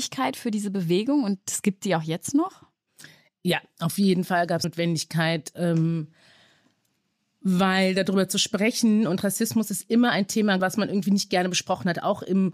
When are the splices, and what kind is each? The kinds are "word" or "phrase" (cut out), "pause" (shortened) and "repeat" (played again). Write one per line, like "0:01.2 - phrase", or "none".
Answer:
0:04.6 - word
0:10.6 - word